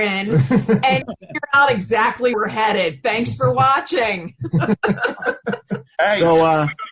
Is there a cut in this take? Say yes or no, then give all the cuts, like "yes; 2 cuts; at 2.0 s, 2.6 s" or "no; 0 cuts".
yes; 2 cuts; at 1.0 s, 2.3 s